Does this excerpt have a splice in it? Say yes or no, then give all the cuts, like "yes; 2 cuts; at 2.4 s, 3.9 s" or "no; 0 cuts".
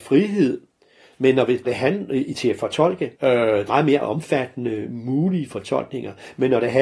yes; 3 cuts; at 1.6 s, 3.1 s, 3.7 s